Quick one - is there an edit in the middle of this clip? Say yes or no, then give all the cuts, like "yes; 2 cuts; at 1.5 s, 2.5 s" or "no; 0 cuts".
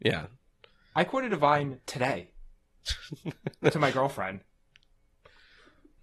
no; 0 cuts